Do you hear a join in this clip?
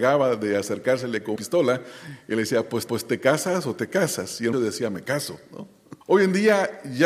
yes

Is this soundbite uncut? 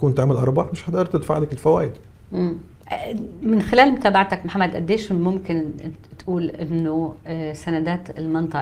yes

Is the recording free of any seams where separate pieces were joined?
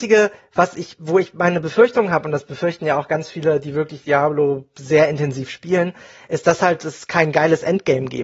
yes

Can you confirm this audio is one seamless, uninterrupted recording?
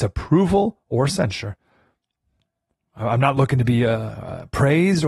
yes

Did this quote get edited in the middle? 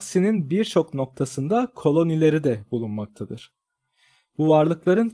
no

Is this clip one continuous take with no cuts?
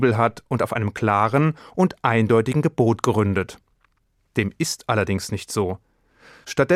yes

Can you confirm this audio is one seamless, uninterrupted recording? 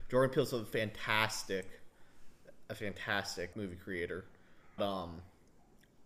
no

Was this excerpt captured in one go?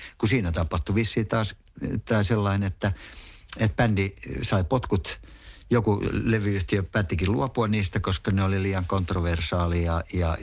yes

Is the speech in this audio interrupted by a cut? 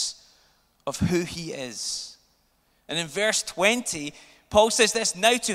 no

